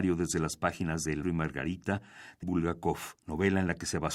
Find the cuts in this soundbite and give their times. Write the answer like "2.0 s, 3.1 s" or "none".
1.2 s, 2.4 s, 3.2 s